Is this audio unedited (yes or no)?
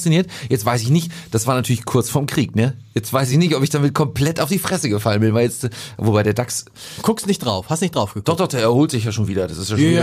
yes